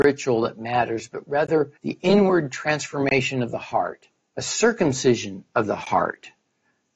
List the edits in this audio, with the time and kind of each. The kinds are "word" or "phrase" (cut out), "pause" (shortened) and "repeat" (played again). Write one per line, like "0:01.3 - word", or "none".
0:01.8 - pause
0:04.2 - pause

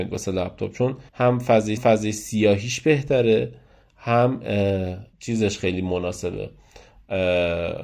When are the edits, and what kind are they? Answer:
0:01.1 - pause
0:01.8 - repeat
0:05.1 - pause

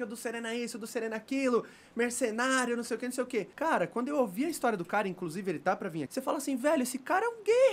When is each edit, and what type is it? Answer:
0:03.5 - pause
0:06.1 - word

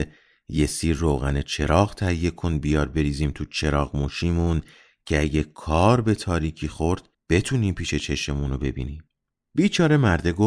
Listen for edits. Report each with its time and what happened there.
none

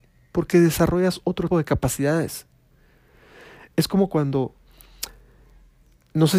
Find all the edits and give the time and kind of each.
0:01.5 - word

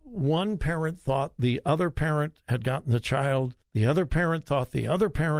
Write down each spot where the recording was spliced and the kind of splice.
0:03.6 - pause

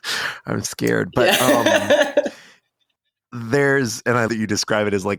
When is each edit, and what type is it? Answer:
0:04.3 - word

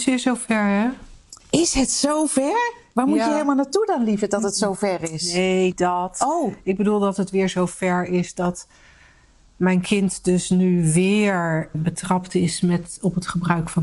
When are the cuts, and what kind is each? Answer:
0:01.4 - pause
0:05.7 - word
0:11.7 - word

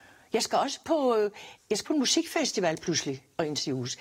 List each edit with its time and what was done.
0:01.8 - word

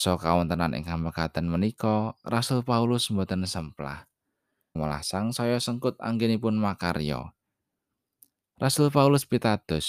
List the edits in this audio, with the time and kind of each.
0:04.8 - word

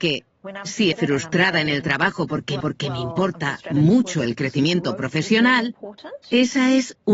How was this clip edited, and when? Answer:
0:00.9 - word
0:02.6 - repeat

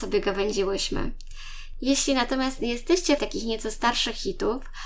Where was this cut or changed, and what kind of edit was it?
0:03.2 - word

